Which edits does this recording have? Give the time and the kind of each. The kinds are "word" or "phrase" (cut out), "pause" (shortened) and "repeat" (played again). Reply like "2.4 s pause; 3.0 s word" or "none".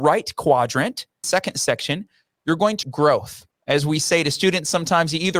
1.2 s phrase; 2.8 s word; 3.5 s pause